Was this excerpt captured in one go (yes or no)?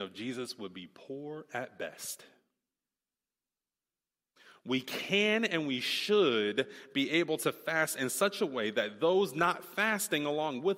yes